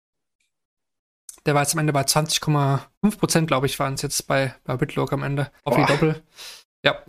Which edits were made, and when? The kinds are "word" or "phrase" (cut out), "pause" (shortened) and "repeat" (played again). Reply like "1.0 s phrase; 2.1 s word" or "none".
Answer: 2.9 s pause; 5.6 s pause